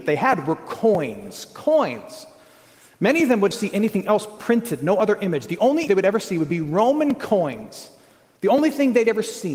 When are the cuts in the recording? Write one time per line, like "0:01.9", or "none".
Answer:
0:03.5
0:05.9